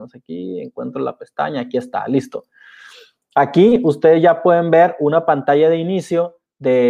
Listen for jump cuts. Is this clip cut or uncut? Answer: uncut